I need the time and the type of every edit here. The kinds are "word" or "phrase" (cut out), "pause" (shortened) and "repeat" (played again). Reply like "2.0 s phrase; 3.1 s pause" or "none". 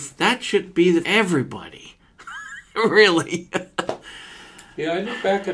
1.0 s word